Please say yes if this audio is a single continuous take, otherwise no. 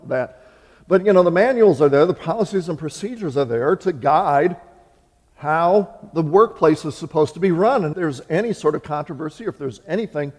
no